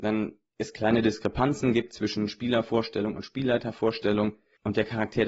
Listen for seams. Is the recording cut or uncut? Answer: uncut